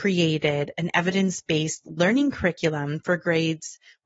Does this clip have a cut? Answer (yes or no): no